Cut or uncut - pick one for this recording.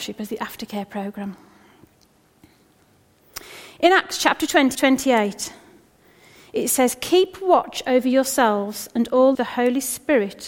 cut